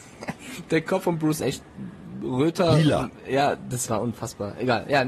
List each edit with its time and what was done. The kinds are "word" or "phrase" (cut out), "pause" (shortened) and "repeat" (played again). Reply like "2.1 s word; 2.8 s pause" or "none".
1.4 s phrase